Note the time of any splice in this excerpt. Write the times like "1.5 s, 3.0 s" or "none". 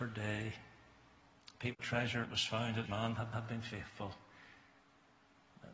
1.8 s, 2.2 s, 2.9 s, 3.3 s